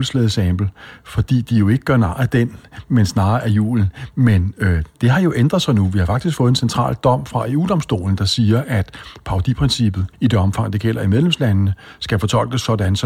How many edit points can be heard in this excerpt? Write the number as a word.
one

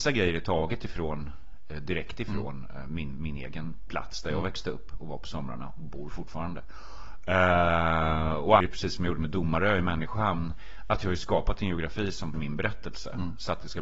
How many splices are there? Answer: two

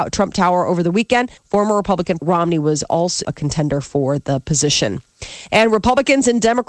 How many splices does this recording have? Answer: three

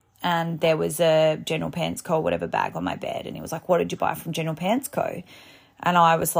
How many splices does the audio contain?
zero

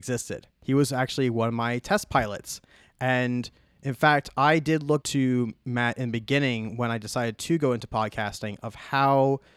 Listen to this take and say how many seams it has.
one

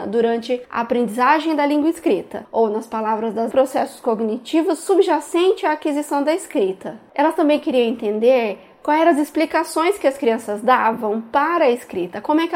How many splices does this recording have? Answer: one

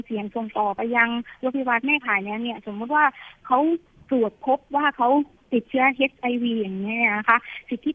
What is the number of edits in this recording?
zero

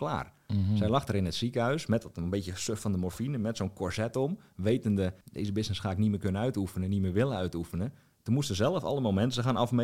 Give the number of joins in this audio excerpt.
one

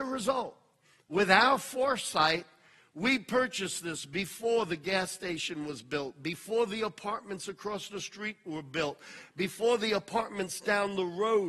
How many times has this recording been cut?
zero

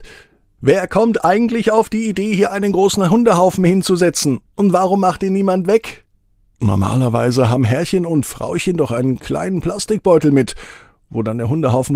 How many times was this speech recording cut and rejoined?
zero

